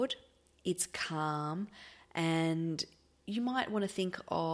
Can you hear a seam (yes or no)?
no